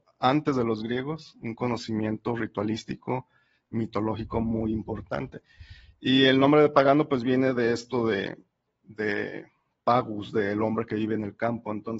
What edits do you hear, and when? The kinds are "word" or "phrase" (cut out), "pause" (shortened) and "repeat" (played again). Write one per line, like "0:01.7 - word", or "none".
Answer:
none